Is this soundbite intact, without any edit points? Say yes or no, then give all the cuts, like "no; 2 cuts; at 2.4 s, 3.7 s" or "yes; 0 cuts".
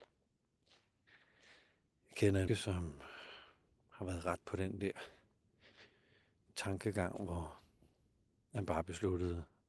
no; 2 cuts; at 2.5 s, 4.4 s